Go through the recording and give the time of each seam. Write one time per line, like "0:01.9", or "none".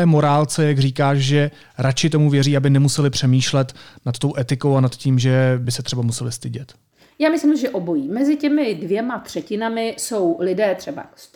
none